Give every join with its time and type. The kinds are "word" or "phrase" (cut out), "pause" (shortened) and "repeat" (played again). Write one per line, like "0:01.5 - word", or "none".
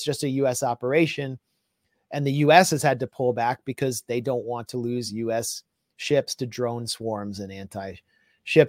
none